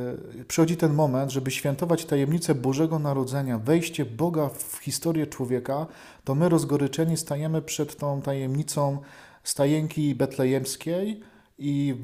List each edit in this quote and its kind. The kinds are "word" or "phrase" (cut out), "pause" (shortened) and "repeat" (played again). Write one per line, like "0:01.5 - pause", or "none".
none